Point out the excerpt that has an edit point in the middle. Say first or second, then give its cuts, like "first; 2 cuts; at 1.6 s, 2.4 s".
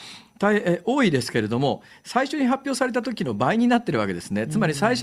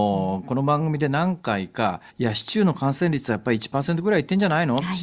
second; 1 cut; at 2.1 s